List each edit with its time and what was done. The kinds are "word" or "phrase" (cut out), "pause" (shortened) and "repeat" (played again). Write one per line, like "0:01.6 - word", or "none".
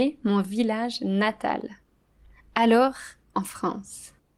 0:03.3 - word

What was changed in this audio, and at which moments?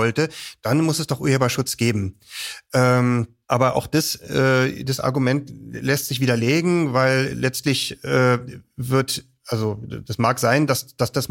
0:03.4 - pause

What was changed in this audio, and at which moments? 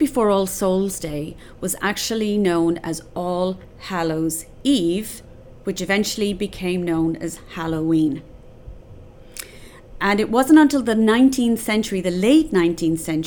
none

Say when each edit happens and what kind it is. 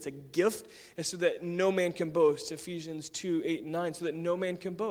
none

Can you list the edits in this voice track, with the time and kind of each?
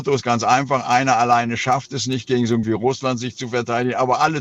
0:02.6 - phrase

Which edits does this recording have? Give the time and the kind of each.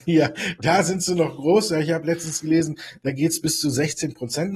none

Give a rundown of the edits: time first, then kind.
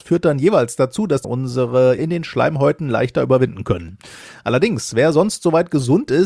0:01.2 - word
0:02.0 - word

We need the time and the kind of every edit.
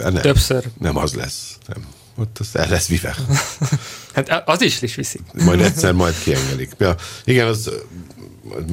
0:01.6 - pause
0:04.8 - phrase
0:05.4 - word

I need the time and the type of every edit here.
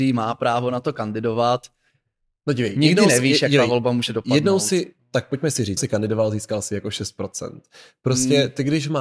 0:05.8 - word

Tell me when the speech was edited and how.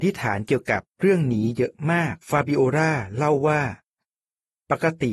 0:02.2 - pause

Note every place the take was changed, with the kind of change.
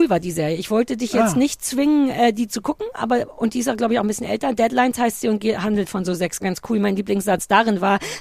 0:06.4 - phrase

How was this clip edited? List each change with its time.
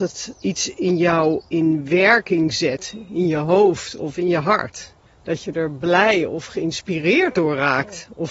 0:01.5 - pause
0:05.1 - pause

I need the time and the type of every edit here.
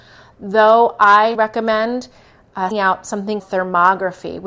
0:01.3 - word
0:02.7 - word
0:03.4 - word

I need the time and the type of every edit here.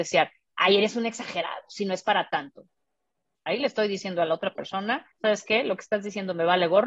0:05.1 - pause

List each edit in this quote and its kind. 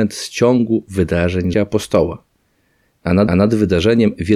0:01.5 - word
0:03.3 - repeat

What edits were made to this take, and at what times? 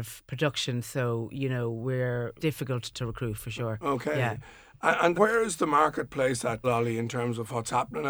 0:02.4 - phrase
0:05.1 - word
0:06.6 - word

